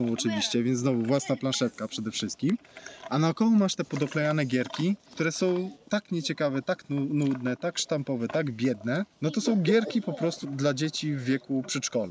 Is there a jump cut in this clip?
yes; 3 cuts; at 5.0 s, 9.1 s, 10.4 s

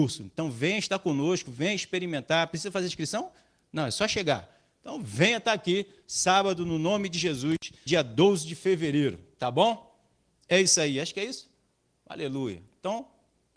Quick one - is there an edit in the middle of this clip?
yes; 1 cut; at 7.9 s

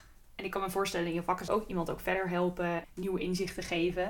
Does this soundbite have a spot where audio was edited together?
yes; 2 cuts; at 1.5 s, 2.8 s

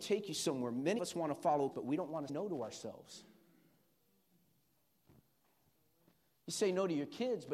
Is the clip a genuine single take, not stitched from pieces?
no; 3 cuts; at 1.0 s, 1.7 s, 2.3 s

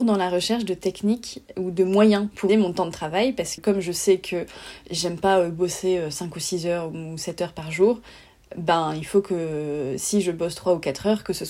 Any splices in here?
yes; 2 cuts; at 2.5 s, 3.6 s

